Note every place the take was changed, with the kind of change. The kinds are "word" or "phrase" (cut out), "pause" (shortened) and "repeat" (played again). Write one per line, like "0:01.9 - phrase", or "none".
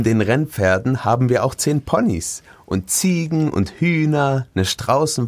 none